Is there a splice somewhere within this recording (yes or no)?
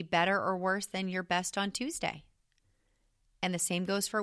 no